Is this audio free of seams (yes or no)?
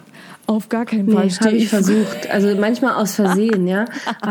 yes